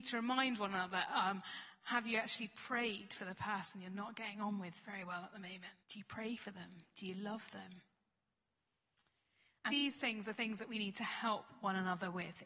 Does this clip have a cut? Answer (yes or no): yes